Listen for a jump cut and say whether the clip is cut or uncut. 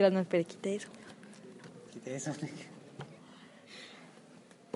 cut